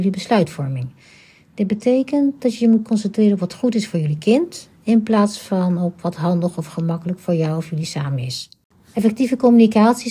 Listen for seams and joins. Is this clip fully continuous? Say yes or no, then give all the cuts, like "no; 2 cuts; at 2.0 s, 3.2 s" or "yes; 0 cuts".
yes; 0 cuts